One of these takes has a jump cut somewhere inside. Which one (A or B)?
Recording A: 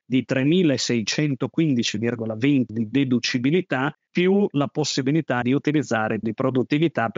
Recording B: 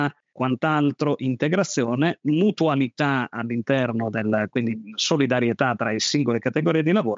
A